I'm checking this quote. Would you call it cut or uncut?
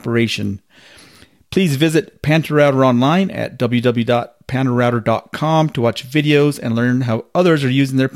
uncut